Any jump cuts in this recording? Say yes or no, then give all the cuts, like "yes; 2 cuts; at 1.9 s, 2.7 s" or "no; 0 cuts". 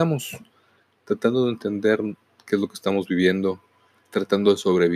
yes; 1 cut; at 4.1 s